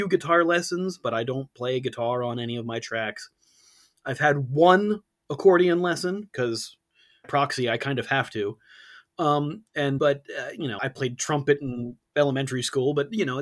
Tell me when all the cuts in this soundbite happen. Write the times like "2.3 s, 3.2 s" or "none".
7.2 s, 10.0 s, 10.8 s